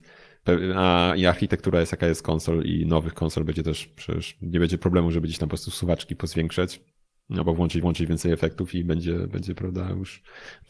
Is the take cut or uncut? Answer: cut